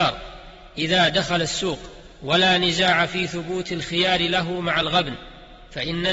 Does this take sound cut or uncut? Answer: uncut